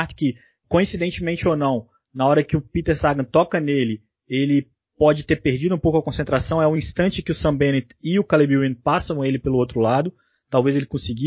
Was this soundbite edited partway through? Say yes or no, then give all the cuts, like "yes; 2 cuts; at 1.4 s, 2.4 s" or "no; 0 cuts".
no; 0 cuts